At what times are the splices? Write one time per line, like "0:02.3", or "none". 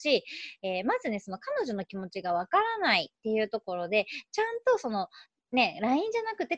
0:05.4